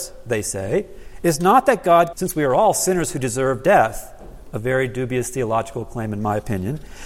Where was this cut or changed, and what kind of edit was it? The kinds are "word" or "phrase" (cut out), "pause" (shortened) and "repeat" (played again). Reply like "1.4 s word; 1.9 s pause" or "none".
2.1 s phrase